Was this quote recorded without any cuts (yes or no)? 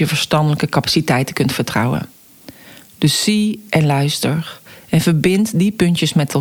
yes